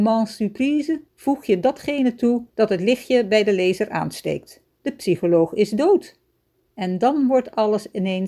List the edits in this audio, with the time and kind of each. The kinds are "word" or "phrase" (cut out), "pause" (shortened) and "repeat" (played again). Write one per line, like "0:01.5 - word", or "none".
0:01.1 - pause
0:02.5 - pause
0:04.6 - pause
0:06.4 - pause